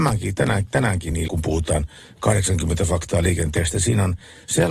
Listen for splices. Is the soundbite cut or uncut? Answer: cut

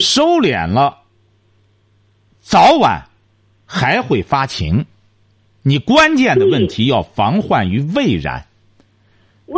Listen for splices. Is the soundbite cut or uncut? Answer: uncut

